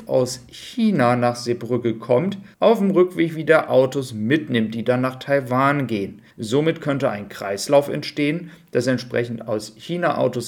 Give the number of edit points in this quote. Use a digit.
2